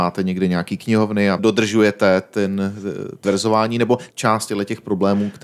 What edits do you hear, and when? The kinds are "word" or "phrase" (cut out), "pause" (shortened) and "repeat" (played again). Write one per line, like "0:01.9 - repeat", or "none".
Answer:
0:01.4 - phrase
0:03.2 - word
0:04.1 - phrase

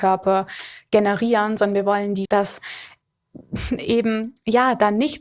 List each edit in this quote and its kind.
0:02.3 - word

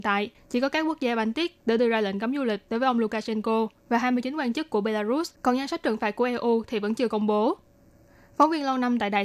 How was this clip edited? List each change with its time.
0:05.3 - pause

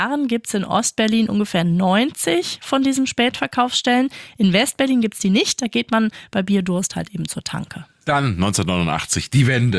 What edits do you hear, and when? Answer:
none

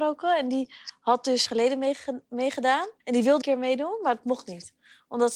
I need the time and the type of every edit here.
0:01.5 - phrase
0:03.0 - pause
0:03.4 - phrase

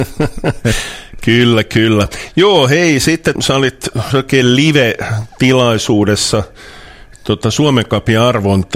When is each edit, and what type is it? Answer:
0:03.4 - word
0:04.1 - word

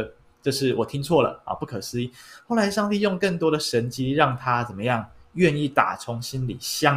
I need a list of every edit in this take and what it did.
none

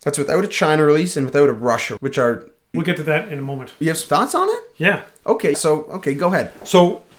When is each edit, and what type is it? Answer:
0:02.0 - word
0:02.7 - word
0:03.8 - word
0:05.5 - word

